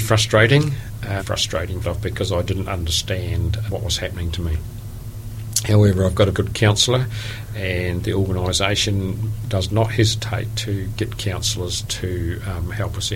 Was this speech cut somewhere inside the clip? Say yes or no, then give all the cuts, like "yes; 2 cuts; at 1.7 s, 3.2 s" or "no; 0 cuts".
yes; 4 cuts; at 1.2 s, 1.8 s, 3.7 s, 6.3 s